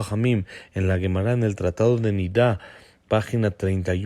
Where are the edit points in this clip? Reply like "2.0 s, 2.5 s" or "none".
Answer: none